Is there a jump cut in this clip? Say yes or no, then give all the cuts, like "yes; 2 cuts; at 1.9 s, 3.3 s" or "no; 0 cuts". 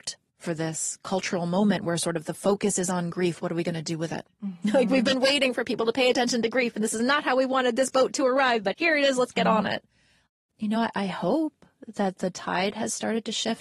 no; 0 cuts